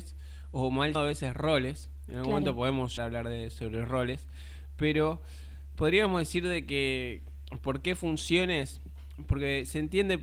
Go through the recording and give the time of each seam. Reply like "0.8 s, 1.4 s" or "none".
0.9 s, 3.0 s